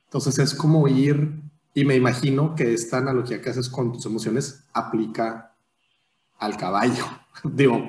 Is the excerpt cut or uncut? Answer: uncut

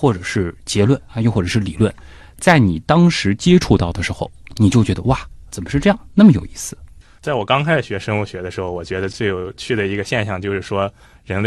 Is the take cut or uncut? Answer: cut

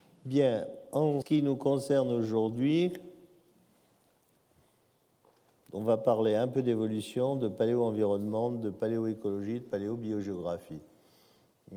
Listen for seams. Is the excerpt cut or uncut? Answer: cut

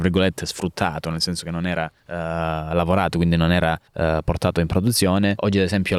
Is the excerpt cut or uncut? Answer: cut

